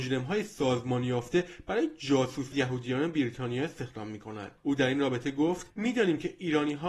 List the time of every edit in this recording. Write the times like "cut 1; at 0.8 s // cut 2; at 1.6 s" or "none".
cut 1; at 2.5 s // cut 2; at 4.6 s